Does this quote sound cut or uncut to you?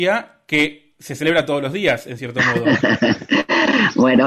uncut